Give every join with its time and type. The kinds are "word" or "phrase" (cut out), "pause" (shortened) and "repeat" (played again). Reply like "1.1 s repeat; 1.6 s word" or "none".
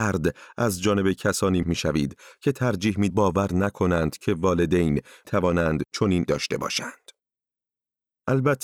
1.6 s word; 3.1 s word; 5.2 s word; 6.3 s word